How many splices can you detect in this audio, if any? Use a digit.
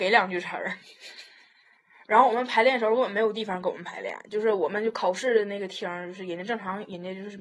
0